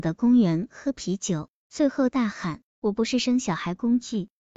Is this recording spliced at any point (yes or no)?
yes